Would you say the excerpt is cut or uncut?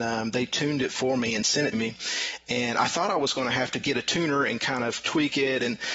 cut